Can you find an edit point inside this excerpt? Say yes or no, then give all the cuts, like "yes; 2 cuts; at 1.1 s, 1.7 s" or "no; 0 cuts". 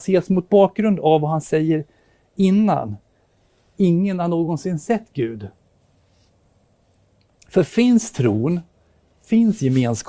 no; 0 cuts